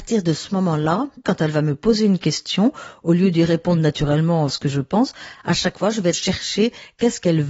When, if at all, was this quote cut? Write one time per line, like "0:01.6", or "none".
0:04.5
0:06.1